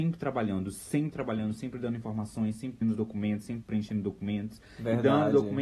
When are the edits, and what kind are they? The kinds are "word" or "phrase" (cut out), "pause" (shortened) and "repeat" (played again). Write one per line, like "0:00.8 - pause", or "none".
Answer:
0:02.8 - word
0:03.6 - word

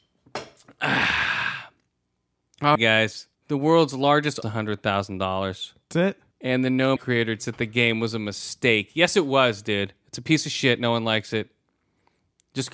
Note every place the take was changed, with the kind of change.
0:02.8 - word
0:03.3 - pause
0:04.4 - phrase
0:06.3 - pause
0:07.0 - phrase
0:07.4 - word

